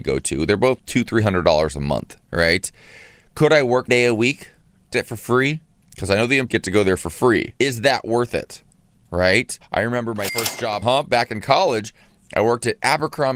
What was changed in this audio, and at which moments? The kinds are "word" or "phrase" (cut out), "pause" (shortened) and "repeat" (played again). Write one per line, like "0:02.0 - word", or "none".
0:02.2 - pause
0:03.9 - phrase
0:04.9 - word
0:06.5 - word
0:07.6 - pause
0:09.6 - pause
0:10.3 - word
0:10.8 - word